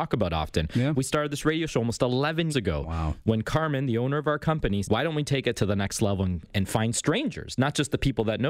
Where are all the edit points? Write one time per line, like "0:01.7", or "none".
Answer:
0:02.5
0:04.8
0:06.5